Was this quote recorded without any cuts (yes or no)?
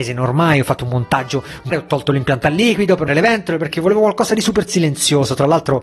no